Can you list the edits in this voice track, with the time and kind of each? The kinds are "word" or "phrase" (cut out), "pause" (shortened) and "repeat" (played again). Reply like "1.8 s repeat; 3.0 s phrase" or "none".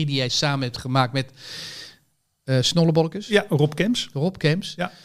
none